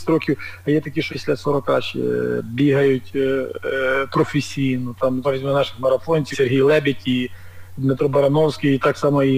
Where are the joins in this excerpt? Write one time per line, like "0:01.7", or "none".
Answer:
0:01.1
0:05.2
0:06.3